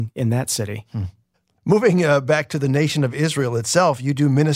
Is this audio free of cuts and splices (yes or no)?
no